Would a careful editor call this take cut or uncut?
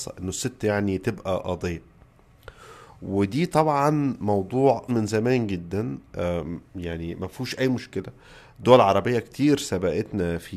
cut